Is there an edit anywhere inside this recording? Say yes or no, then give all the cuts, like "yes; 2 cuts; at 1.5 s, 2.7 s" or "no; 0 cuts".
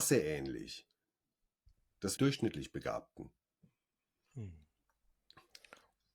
yes; 1 cut; at 2.2 s